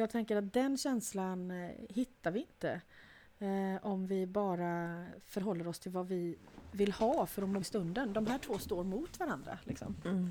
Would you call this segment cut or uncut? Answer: cut